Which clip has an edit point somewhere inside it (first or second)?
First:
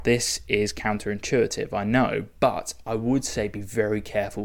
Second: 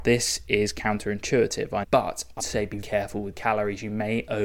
second